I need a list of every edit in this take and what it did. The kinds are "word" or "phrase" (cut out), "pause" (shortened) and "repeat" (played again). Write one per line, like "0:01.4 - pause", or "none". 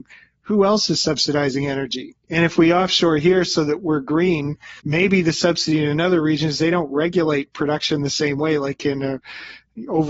0:02.2 - pause
0:04.8 - pause